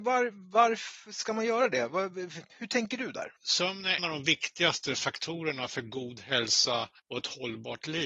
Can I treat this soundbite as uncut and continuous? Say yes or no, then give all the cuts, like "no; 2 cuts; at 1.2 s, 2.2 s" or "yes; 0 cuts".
no; 3 cuts; at 3.4 s, 4.0 s, 7.0 s